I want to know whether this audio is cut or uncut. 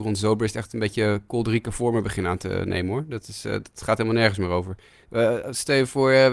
uncut